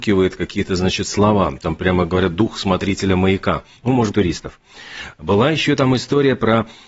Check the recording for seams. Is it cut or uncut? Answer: cut